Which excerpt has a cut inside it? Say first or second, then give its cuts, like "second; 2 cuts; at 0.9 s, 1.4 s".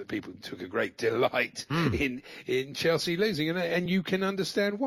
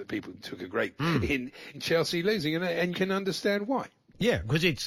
second; 3 cuts; at 1.0 s, 1.7 s, 2.9 s